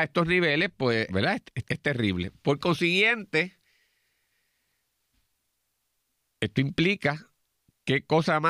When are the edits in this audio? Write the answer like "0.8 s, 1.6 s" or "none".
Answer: 1.1 s, 1.6 s